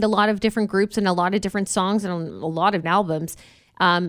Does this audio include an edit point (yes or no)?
yes